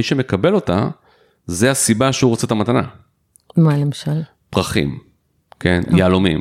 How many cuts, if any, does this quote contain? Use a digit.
0